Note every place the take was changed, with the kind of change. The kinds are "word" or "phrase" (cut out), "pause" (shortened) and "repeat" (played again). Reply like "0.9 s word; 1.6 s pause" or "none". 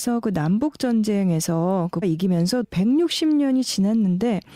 2.0 s word; 2.6 s phrase